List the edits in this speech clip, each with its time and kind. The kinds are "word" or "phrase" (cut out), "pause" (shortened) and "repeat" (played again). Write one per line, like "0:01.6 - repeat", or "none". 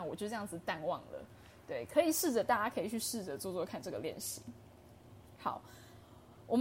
none